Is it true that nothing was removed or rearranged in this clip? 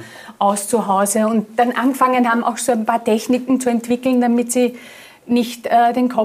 yes; 0 cuts

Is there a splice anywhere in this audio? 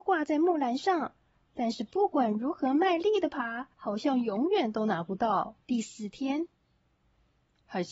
yes; 2 cuts; at 3.7 s, 5.6 s

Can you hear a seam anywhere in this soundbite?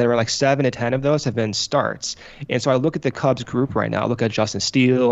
no; 0 cuts

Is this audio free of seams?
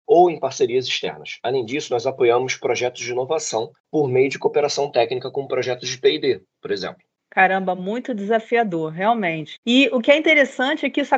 yes; 0 cuts

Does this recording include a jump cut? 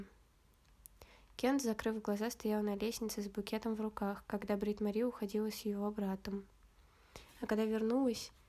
no; 0 cuts

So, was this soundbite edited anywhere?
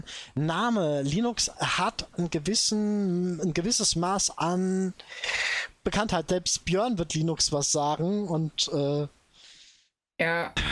no; 0 cuts

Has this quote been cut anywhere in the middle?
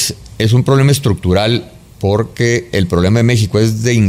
no; 0 cuts

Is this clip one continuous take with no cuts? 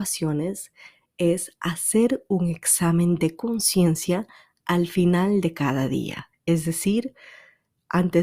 yes; 0 cuts

